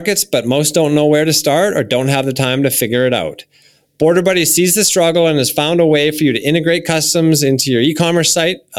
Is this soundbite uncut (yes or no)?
yes